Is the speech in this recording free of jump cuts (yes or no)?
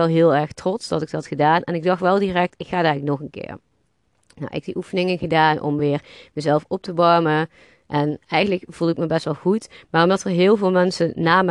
yes